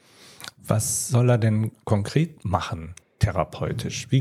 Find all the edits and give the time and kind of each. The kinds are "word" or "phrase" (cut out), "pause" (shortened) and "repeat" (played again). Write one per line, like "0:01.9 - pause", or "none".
0:03.0 - pause